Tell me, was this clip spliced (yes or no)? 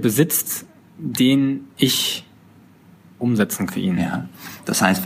yes